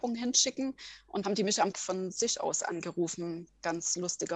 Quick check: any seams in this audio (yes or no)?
yes